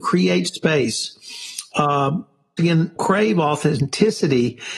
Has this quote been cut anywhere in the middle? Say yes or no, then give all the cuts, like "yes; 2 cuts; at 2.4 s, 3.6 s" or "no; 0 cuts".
yes; 2 cuts; at 2.6 s, 3.0 s